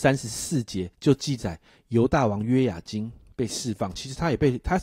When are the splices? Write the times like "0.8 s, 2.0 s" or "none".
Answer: 0.9 s